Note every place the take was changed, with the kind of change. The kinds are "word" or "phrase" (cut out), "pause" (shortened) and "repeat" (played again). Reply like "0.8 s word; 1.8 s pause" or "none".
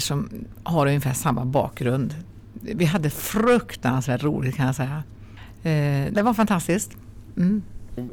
6.1 s word